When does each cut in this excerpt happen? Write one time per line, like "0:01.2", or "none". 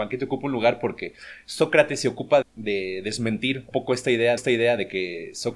0:02.4
0:03.7
0:04.4